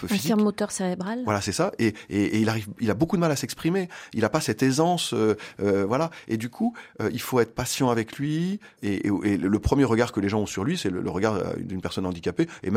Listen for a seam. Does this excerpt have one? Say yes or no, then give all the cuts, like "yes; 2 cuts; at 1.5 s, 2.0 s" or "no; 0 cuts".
no; 0 cuts